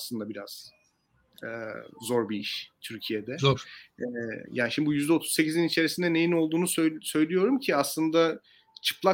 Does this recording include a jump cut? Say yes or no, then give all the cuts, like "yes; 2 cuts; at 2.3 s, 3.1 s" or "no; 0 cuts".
no; 0 cuts